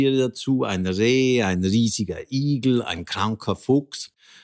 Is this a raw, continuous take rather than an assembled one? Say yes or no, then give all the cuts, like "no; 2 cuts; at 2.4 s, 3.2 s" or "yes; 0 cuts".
yes; 0 cuts